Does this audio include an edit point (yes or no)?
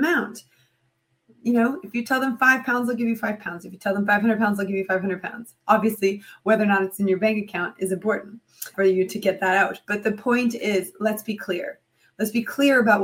yes